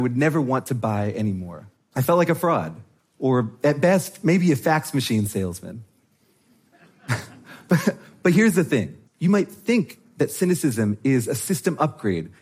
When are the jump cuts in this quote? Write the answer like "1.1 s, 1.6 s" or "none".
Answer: 1.8 s, 3.0 s, 9.1 s